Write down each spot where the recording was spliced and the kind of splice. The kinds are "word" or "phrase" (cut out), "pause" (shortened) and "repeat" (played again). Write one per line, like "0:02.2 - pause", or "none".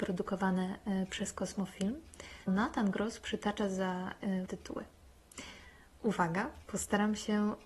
0:02.5 - word
0:04.5 - phrase